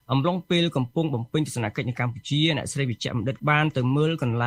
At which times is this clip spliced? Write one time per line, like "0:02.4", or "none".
0:03.4